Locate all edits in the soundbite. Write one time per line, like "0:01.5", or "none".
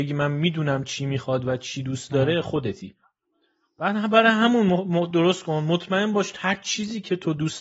none